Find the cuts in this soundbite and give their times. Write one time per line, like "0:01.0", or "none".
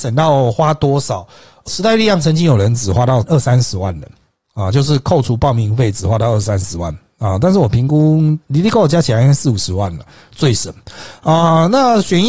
none